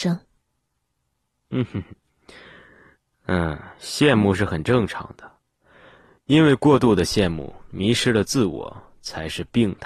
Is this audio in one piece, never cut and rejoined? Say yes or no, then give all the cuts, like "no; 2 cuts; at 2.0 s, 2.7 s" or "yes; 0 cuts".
yes; 0 cuts